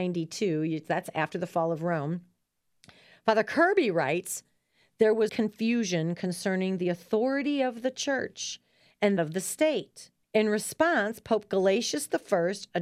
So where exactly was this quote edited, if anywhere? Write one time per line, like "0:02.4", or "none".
0:05.3
0:09.2
0:10.2